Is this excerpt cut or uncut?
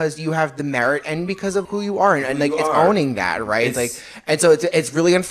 cut